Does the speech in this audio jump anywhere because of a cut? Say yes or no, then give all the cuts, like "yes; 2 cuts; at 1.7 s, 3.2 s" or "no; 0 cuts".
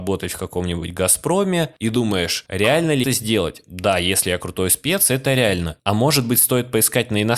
yes; 1 cut; at 3.0 s